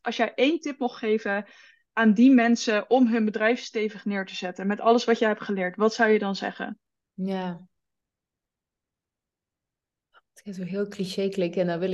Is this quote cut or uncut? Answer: uncut